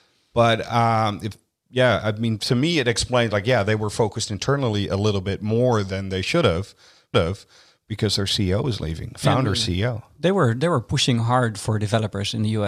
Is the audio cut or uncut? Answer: cut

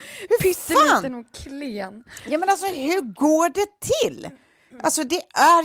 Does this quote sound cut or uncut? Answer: uncut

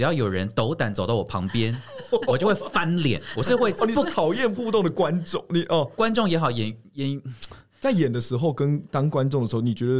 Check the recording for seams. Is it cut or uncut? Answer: uncut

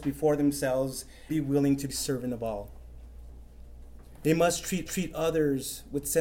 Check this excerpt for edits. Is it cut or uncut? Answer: cut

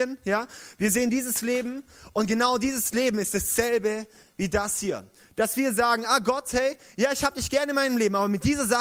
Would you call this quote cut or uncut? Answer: uncut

